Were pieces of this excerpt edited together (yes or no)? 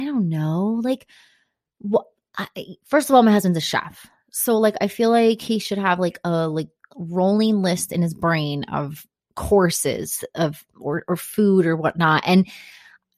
no